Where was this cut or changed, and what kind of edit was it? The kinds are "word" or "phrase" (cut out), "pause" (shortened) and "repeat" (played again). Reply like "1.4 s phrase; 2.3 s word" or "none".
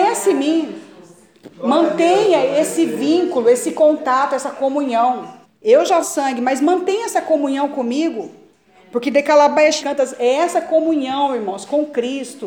1.5 s pause; 5.4 s pause; 6.0 s phrase; 9.8 s word